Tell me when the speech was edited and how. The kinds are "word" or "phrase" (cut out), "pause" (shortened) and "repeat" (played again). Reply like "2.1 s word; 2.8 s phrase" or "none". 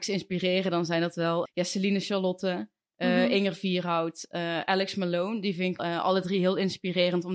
1.4 s word; 5.8 s word